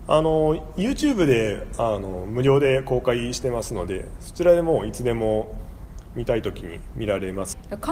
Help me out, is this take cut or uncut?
uncut